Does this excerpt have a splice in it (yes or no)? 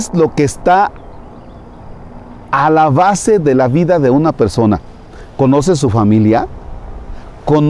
no